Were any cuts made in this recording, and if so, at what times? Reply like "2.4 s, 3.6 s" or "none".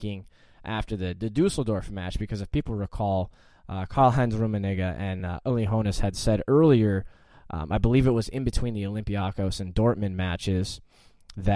none

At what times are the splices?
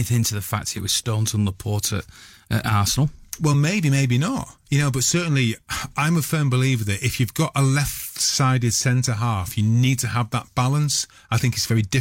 none

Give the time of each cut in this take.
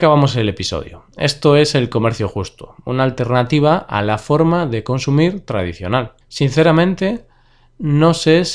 6.2 s

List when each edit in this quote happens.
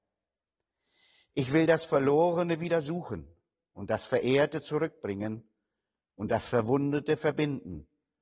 none

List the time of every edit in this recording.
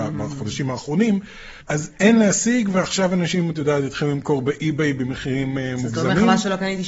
1.6 s

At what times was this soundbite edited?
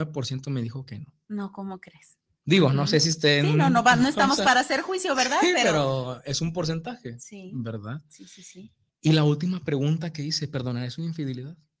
2.3 s, 8.9 s

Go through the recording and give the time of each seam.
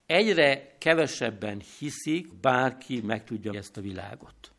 2.3 s, 3.5 s

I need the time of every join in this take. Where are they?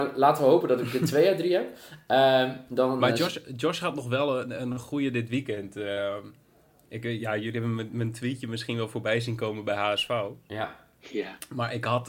none

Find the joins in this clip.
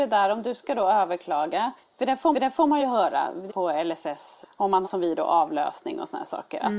1.8 s, 2.3 s, 2.8 s, 3.5 s, 4.4 s, 4.8 s

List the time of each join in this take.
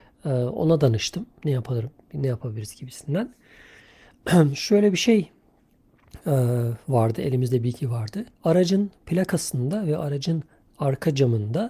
8.3 s

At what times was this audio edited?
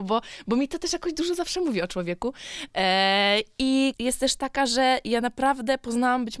3.9 s

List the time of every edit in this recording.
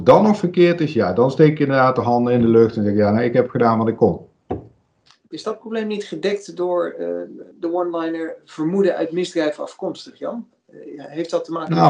7.5 s

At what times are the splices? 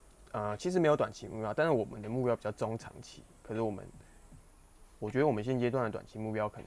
none

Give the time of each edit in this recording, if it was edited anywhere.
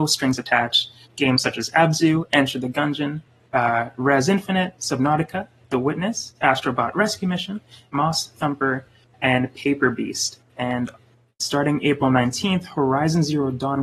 none

